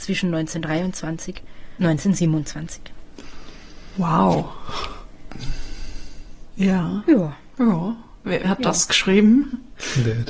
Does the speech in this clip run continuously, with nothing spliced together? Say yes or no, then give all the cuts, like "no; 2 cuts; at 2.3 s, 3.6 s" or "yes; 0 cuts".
no; 2 cuts; at 1.8 s, 8.4 s